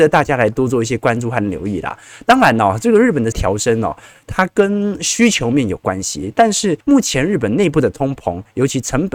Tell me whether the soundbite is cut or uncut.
cut